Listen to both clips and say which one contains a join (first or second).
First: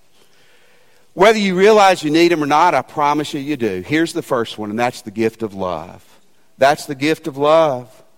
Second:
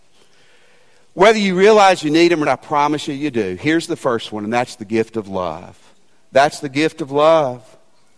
second